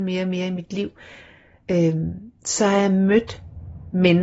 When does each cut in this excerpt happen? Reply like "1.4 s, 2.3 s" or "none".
none